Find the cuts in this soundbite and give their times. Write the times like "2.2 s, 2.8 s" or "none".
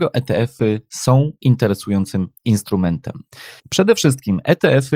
3.6 s